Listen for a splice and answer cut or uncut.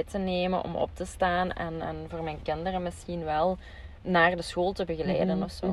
uncut